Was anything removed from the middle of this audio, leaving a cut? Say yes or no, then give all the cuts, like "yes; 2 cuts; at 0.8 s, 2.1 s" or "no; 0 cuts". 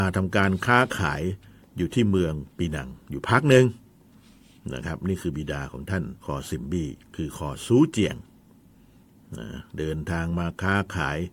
yes; 3 cuts; at 1.6 s, 2.5 s, 6.2 s